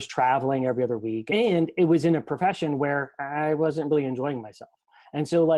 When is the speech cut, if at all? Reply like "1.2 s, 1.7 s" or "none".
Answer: none